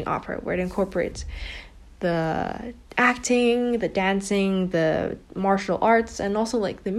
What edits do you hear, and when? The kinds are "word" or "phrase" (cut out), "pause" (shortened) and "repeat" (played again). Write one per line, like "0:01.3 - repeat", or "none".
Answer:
none